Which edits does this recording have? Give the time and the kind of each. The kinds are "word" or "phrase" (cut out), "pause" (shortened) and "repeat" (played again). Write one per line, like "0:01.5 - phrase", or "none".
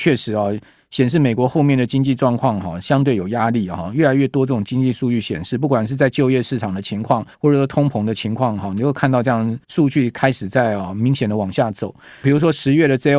0:07.3 - pause
0:09.6 - pause
0:12.2 - word